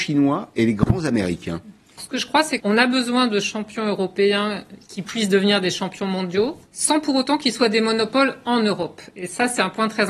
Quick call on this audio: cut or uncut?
cut